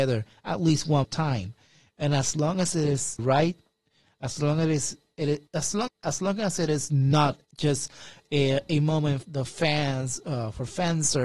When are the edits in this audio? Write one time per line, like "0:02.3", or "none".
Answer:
0:01.0
0:03.2
0:05.5
0:05.9
0:07.4
0:09.2